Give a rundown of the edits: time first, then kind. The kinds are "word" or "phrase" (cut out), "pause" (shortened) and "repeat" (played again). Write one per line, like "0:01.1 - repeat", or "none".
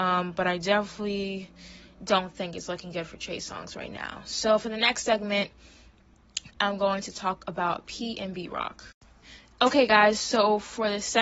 none